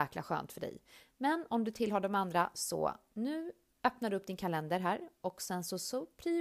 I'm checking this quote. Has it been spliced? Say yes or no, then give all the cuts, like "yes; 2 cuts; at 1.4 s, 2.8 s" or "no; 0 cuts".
no; 0 cuts